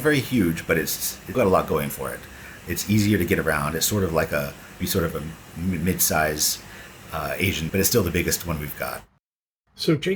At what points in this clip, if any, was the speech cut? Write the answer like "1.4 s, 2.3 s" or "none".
1.3 s, 4.8 s, 7.7 s

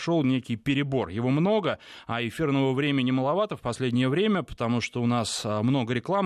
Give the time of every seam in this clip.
none

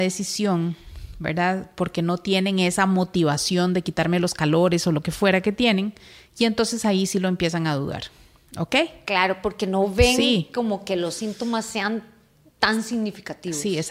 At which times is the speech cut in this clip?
none

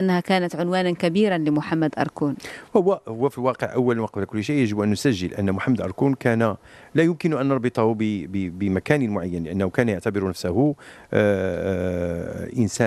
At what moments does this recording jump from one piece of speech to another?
none

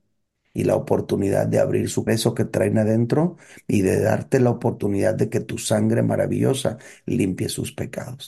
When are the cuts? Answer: 2.1 s

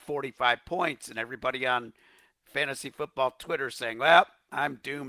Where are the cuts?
none

